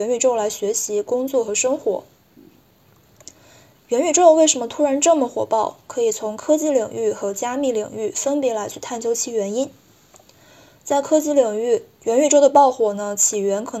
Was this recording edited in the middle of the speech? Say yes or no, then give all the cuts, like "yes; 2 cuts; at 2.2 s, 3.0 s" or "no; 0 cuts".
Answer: no; 0 cuts